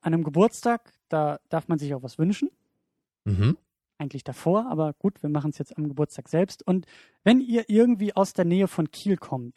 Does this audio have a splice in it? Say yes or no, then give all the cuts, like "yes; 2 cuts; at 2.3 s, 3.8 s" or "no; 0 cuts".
no; 0 cuts